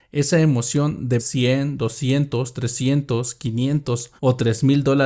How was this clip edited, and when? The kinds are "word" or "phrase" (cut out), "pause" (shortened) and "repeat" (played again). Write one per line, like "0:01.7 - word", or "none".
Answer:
0:01.2 - phrase
0:04.2 - pause